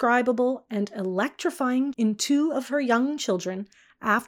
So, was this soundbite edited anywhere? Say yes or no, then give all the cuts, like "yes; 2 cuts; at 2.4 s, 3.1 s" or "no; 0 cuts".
yes; 1 cut; at 1.9 s